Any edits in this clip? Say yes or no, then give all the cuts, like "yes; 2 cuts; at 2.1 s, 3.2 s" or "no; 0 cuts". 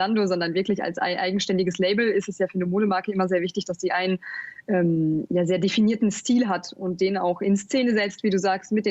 no; 0 cuts